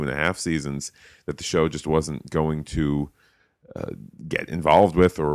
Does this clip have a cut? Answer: no; 0 cuts

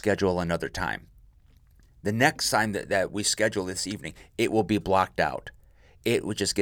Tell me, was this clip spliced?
no; 0 cuts

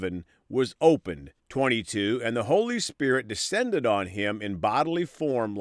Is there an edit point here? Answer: yes; 1 cut; at 1.4 s

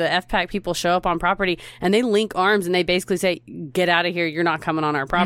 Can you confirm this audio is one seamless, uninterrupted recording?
yes; 0 cuts

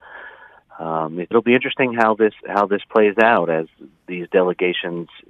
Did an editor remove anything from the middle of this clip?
yes; 2 cuts; at 1.3 s, 2.4 s

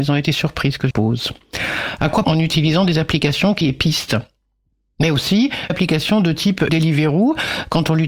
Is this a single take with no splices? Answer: no; 5 cuts; at 0.9 s, 2.2 s, 3.6 s, 5.7 s, 6.7 s

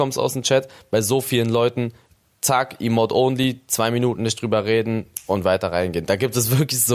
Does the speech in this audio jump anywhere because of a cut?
no; 0 cuts

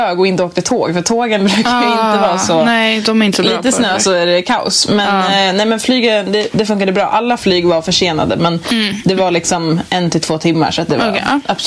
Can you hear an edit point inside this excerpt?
no; 0 cuts

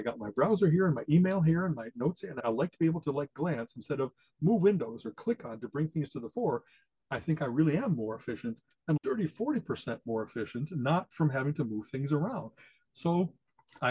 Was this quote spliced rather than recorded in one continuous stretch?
no; 0 cuts

